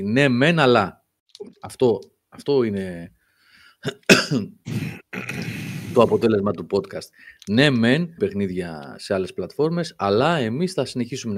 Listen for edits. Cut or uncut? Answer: cut